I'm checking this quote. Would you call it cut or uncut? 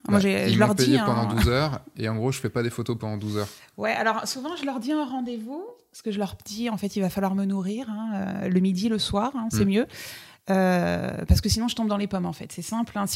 uncut